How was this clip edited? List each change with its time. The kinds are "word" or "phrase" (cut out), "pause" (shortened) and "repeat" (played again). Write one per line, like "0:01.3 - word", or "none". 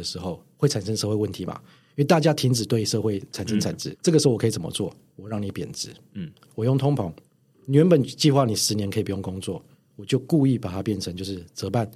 0:03.9 - word